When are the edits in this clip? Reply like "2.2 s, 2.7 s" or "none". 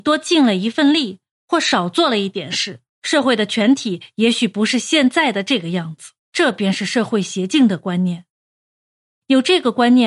2.9 s, 6.2 s

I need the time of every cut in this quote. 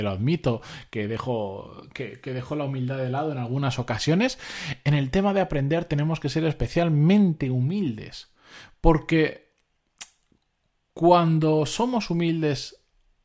none

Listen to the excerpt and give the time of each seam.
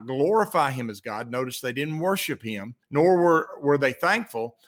2.8 s

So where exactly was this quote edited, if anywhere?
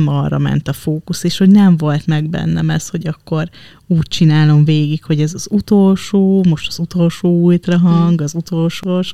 none

